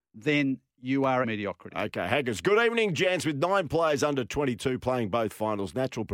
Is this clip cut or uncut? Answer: cut